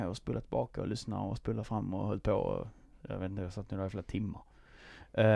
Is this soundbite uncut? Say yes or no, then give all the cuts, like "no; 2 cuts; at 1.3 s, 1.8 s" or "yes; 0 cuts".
yes; 0 cuts